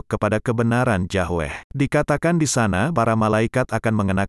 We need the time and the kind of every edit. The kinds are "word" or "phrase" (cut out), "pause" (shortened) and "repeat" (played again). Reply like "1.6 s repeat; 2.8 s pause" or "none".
1.7 s pause; 2.9 s word